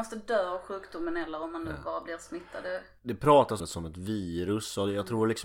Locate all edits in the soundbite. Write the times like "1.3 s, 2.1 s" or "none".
3.6 s